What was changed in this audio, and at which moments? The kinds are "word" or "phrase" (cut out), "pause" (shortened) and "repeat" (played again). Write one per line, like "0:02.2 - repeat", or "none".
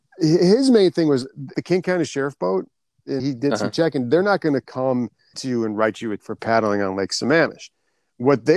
0:01.5 - word
0:03.2 - word
0:05.3 - word
0:06.2 - word